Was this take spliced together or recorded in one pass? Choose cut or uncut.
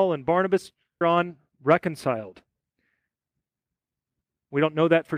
cut